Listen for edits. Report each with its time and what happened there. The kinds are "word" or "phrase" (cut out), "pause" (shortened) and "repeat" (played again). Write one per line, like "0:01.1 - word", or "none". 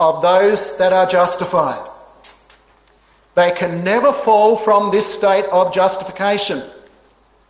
none